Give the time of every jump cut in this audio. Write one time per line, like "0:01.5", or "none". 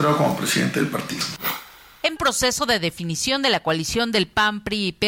0:02.2